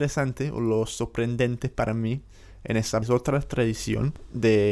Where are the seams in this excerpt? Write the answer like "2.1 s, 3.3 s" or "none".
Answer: 3.0 s